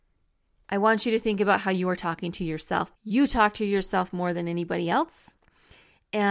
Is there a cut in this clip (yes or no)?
yes